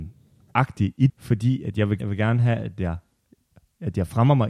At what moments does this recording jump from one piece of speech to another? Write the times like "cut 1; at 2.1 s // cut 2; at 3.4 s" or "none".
cut 1; at 1.1 s // cut 2; at 2.0 s